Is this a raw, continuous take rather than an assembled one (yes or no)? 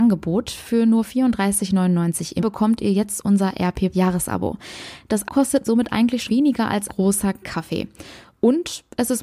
no